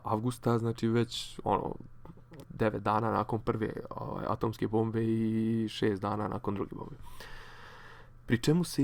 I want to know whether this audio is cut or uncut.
cut